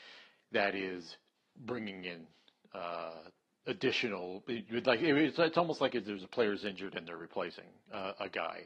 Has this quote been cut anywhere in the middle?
no; 0 cuts

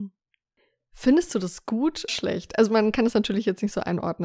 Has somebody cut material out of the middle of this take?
yes; 1 cut; at 2.1 s

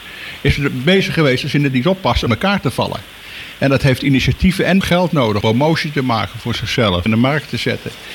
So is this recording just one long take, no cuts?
no; 4 cuts; at 2.3 s, 4.8 s, 5.4 s, 7.1 s

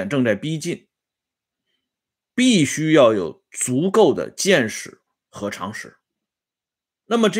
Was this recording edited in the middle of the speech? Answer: no; 0 cuts

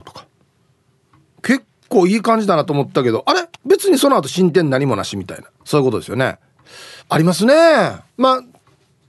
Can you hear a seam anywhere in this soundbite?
yes; 4 cuts; at 3.5 s, 5.5 s, 7.0 s, 8.1 s

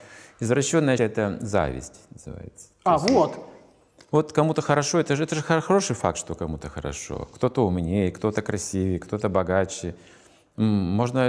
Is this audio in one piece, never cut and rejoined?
no; 1 cut; at 1.0 s

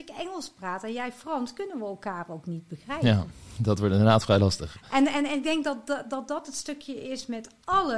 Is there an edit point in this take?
no; 0 cuts

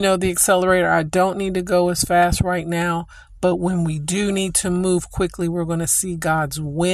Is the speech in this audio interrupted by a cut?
no; 0 cuts

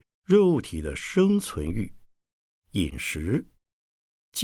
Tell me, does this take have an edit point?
no; 0 cuts

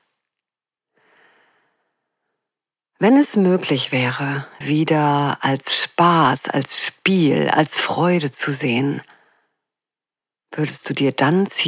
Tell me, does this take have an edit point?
yes; 1 cut; at 4.6 s

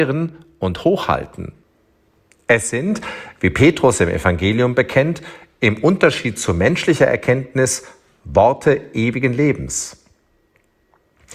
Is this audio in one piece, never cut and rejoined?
yes; 0 cuts

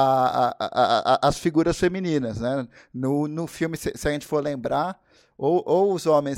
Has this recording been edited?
no; 0 cuts

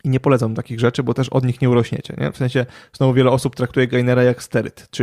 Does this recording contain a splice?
no; 0 cuts

